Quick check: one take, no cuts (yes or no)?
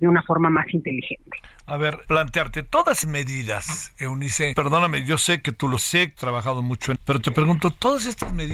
no